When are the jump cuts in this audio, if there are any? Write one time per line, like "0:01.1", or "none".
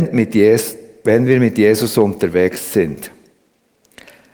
none